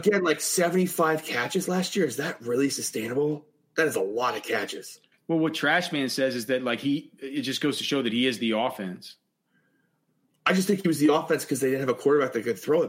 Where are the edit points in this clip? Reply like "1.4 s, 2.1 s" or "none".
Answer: none

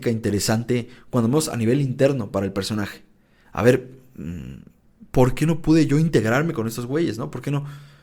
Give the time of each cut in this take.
none

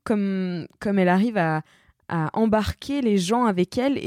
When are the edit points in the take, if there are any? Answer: none

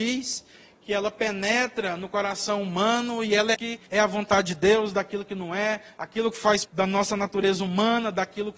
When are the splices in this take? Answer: 3.5 s, 3.9 s, 6.6 s

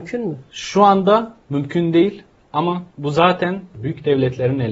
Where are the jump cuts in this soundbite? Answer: none

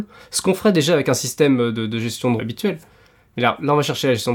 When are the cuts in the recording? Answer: 2.4 s

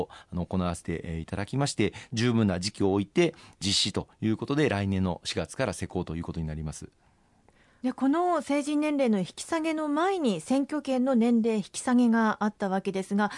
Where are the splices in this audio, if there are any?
none

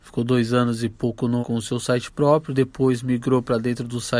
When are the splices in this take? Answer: 1.4 s

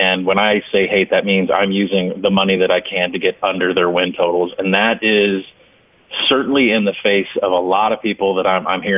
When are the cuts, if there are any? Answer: none

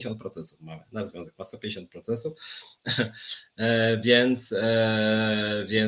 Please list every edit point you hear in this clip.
none

